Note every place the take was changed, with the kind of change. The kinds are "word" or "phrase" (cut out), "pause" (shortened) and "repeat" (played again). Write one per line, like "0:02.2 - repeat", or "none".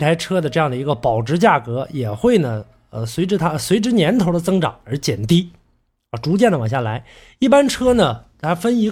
none